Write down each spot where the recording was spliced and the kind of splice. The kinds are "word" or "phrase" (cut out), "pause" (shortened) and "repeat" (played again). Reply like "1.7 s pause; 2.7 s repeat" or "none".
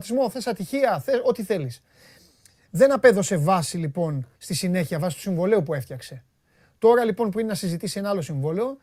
4.3 s pause